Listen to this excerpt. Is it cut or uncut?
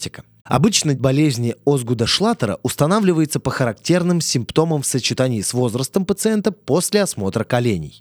cut